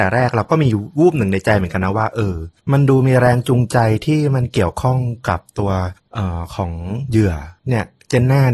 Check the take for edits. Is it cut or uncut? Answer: cut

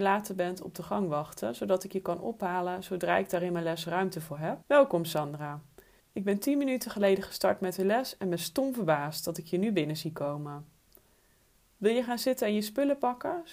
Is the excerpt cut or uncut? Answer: cut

